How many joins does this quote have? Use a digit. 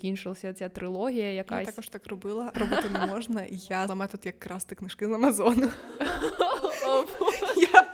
2